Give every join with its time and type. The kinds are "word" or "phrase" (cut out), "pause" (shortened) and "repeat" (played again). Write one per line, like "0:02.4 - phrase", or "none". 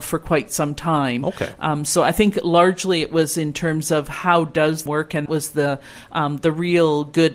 0:04.9 - phrase
0:05.3 - phrase